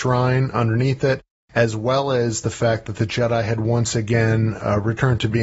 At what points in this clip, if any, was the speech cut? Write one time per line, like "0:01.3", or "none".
none